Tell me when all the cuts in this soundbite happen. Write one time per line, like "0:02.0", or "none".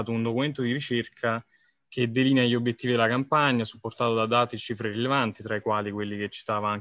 none